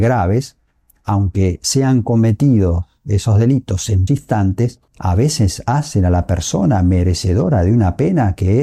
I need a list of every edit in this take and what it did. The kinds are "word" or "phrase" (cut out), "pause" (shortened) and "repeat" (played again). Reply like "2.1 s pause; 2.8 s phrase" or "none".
4.1 s word; 4.9 s pause